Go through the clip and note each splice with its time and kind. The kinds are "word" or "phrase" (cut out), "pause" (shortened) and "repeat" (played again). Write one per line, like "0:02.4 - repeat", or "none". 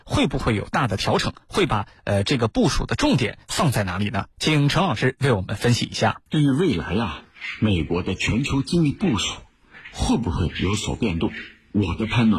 0:04.3 - pause
0:06.3 - pause